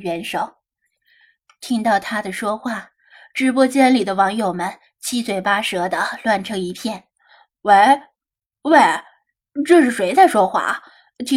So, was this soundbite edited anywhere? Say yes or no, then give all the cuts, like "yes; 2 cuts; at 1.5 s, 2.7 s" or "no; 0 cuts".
no; 0 cuts